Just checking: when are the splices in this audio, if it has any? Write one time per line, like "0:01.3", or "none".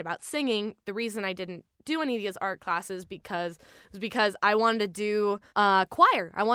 0:05.5